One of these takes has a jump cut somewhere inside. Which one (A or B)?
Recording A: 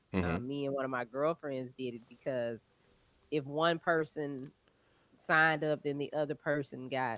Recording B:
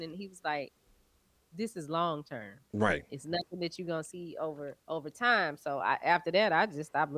B